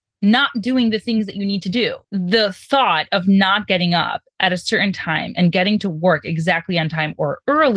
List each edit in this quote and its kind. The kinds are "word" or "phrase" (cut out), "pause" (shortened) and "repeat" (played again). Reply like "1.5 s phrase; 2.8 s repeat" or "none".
2.0 s pause